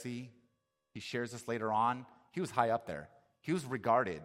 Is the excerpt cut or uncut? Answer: uncut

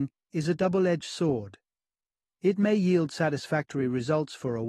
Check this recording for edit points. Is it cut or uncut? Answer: uncut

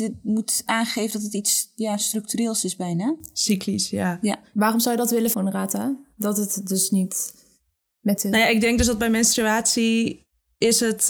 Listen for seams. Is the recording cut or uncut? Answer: cut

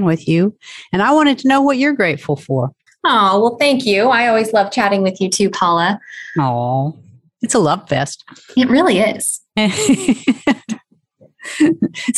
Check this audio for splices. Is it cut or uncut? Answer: cut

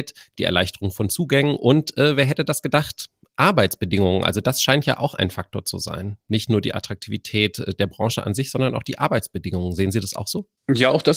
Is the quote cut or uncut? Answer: uncut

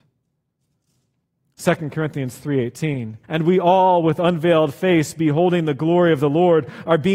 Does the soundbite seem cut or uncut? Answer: cut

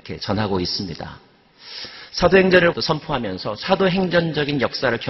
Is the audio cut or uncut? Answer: cut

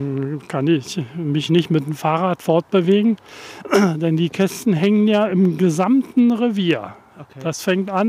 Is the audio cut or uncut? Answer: uncut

